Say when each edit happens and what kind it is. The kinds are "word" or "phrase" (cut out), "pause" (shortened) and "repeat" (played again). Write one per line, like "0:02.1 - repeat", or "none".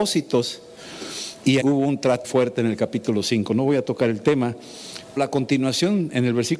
0:01.6 - word
0:02.2 - word
0:05.2 - word